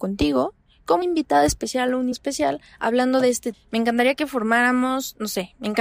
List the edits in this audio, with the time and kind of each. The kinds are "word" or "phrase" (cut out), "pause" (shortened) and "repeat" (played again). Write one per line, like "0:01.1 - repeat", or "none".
0:01.0 - word
0:02.1 - word
0:03.5 - word